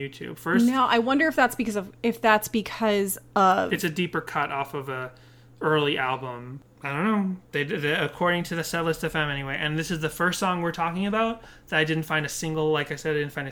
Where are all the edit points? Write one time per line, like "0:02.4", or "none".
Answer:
none